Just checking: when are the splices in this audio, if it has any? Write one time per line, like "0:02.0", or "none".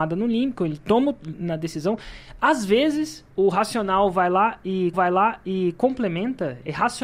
0:03.3
0:04.9